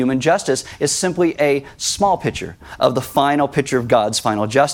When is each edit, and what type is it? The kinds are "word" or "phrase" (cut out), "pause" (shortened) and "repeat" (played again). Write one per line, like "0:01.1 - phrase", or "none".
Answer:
none